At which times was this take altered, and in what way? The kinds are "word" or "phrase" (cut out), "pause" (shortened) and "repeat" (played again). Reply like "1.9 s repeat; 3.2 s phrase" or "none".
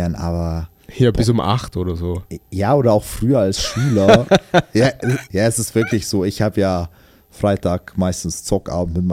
none